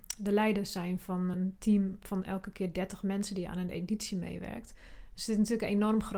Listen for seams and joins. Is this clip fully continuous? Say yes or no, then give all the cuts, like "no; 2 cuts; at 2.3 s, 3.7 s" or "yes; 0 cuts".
yes; 0 cuts